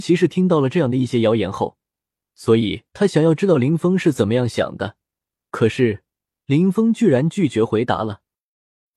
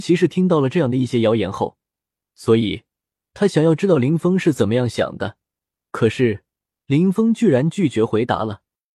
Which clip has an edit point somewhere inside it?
first; 1 cut; at 2.9 s

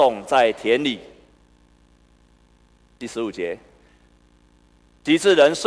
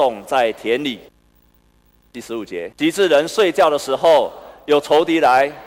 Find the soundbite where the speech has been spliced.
second; 2 cuts; at 1.1 s, 2.7 s

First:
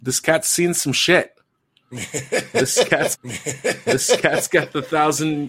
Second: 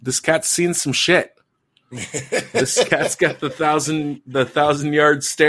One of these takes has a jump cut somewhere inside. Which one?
first; 1 cut; at 3.1 s

